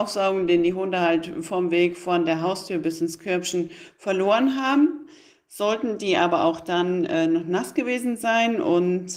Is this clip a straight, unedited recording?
yes; 0 cuts

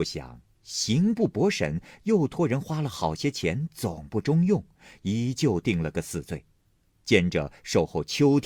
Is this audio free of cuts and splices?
yes; 0 cuts

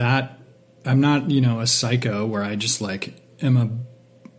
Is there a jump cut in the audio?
no; 0 cuts

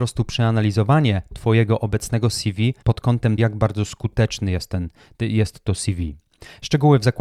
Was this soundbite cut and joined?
yes; 2 cuts; at 2.8 s, 3.4 s

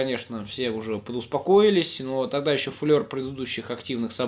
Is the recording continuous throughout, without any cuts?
yes; 0 cuts

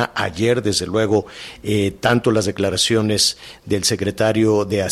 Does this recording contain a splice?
no; 0 cuts

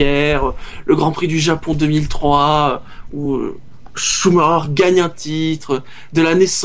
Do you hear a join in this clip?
no; 0 cuts

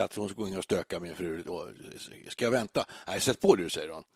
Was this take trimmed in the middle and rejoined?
no; 0 cuts

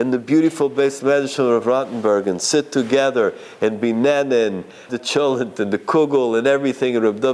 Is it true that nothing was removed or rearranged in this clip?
no; 1 cut; at 4.9 s

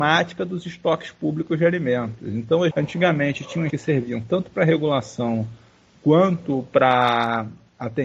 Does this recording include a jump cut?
yes; 2 cuts; at 2.7 s, 3.7 s

